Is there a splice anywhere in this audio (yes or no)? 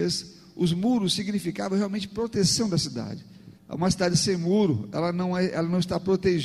yes